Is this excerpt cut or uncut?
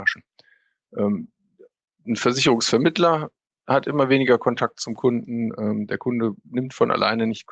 uncut